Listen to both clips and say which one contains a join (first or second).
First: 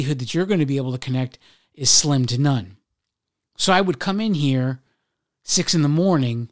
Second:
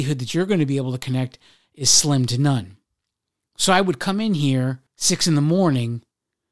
second